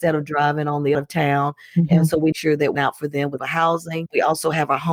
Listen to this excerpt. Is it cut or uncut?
cut